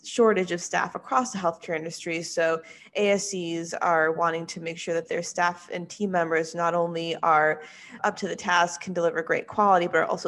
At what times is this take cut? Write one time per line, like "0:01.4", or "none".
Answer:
0:08.0